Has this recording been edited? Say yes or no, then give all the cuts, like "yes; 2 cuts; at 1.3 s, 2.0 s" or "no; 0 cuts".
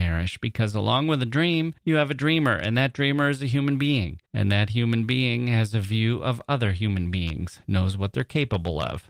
yes; 2 cuts; at 1.8 s, 4.3 s